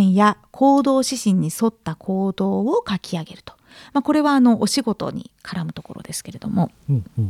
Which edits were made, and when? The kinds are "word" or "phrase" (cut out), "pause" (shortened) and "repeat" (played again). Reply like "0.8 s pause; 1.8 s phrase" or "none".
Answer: none